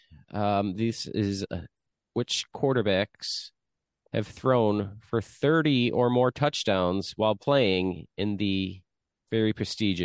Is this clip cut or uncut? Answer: uncut